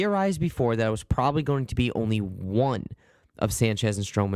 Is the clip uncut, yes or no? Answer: yes